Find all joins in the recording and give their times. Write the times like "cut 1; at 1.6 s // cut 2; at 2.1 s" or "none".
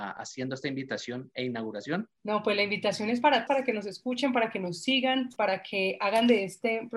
cut 1; at 2.2 s // cut 2; at 3.5 s